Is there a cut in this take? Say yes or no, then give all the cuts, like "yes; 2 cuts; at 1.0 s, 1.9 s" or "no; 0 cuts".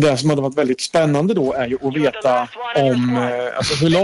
no; 0 cuts